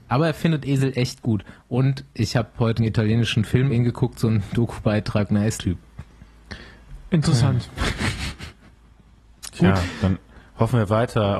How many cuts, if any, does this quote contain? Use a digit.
3